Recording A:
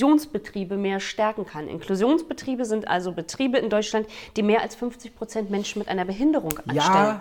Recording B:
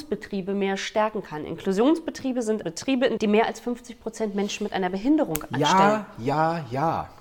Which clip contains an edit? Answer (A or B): B